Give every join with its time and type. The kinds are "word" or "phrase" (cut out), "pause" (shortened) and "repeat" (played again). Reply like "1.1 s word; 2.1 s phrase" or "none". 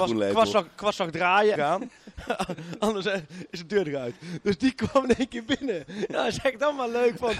1.6 s phrase